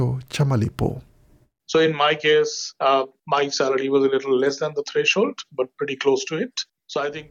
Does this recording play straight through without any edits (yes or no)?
yes